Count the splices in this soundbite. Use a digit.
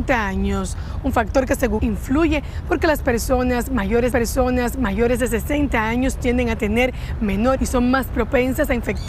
3